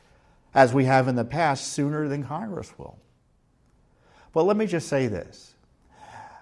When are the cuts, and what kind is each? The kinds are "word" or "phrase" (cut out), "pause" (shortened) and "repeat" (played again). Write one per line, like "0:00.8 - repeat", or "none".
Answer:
none